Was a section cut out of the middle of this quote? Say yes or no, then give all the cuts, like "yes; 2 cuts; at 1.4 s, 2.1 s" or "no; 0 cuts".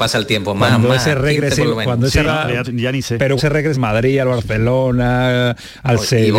yes; 4 cuts; at 2.2 s, 2.6 s, 3.4 s, 3.7 s